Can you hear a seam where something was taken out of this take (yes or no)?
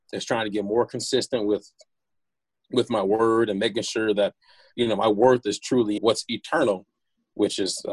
yes